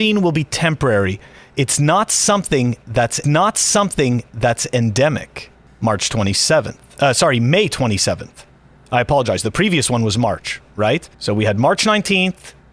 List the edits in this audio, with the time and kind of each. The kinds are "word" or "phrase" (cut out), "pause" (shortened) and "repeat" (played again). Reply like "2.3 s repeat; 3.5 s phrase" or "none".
3.2 s repeat; 11.1 s pause